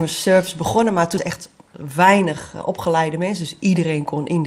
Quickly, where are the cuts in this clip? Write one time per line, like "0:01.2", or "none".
0:01.2